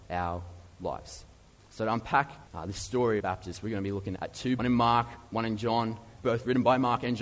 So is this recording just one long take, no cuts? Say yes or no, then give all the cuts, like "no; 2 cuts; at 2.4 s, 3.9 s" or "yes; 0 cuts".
no; 6 cuts; at 1.6 s, 2.5 s, 3.2 s, 4.2 s, 4.6 s, 6.2 s